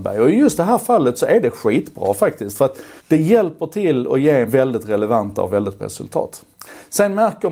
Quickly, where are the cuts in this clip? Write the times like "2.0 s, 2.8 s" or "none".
3.0 s, 4.5 s, 5.8 s